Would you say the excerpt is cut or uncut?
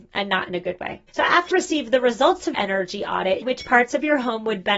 cut